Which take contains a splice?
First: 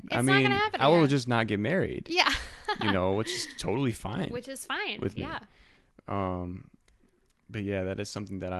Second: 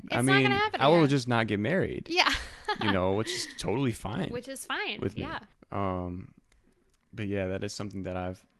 second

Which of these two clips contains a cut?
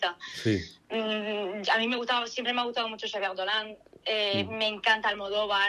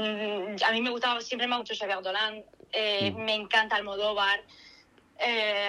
second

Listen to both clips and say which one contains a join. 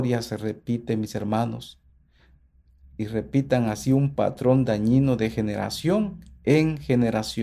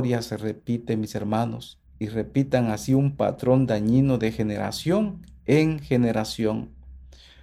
second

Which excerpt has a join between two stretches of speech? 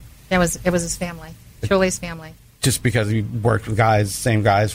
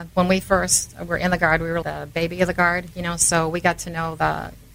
second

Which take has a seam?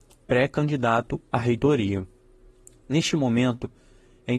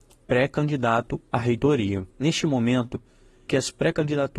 second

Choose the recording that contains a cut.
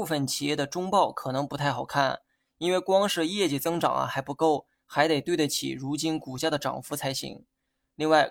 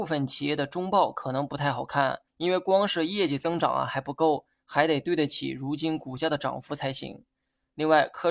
second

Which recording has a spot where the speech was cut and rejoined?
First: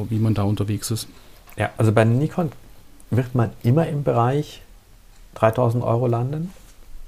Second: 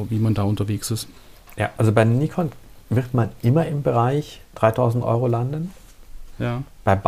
second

